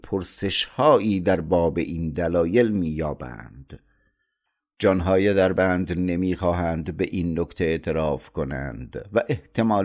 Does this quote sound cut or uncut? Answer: uncut